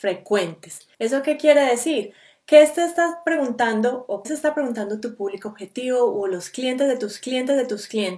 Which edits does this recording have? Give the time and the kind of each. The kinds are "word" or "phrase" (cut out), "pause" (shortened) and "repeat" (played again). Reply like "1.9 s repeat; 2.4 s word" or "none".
0.9 s pause; 4.2 s word; 7.2 s repeat